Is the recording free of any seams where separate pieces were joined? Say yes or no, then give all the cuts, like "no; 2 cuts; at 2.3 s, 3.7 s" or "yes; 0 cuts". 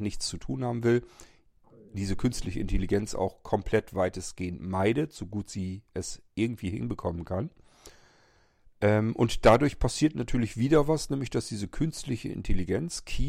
yes; 0 cuts